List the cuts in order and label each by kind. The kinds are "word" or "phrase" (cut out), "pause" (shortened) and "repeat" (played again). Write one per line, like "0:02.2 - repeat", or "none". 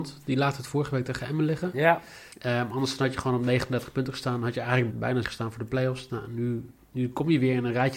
0:02.3 - pause
0:04.9 - word
0:05.2 - word